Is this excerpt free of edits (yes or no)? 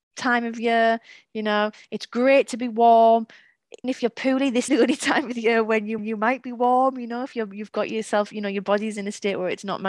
no